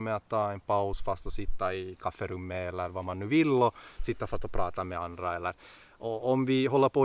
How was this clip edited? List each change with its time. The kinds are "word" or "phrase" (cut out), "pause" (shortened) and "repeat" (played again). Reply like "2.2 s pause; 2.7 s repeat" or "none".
none